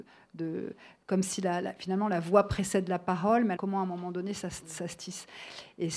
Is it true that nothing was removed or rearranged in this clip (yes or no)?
no